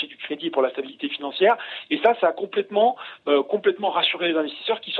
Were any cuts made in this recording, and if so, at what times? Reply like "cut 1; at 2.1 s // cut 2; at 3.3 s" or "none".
none